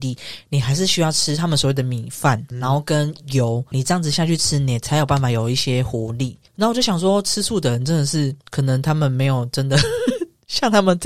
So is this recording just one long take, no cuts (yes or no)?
no